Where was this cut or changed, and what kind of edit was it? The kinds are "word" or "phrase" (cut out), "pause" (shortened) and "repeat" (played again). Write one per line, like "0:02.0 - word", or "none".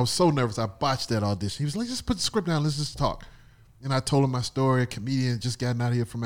none

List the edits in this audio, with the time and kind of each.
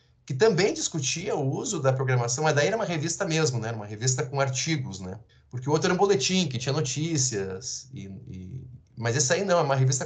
0:05.3 - pause

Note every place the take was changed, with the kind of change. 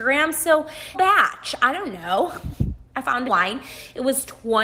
0:00.9 - word
0:03.2 - phrase

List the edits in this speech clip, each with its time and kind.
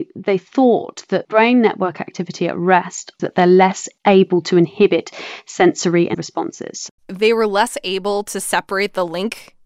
0:01.2 - word
0:03.2 - word
0:04.0 - pause
0:06.1 - word
0:07.0 - word

